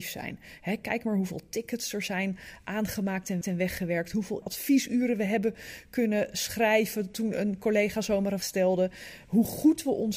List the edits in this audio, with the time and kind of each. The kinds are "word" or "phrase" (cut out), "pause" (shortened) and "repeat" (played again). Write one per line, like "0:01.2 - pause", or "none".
0:03.4 - repeat
0:04.4 - word
0:08.4 - word